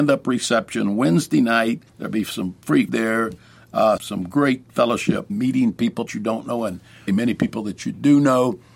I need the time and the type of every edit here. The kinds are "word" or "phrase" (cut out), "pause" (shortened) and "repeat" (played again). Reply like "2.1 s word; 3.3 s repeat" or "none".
1.9 s pause; 2.9 s word; 4.0 s word; 5.3 s word; 6.1 s phrase; 7.1 s word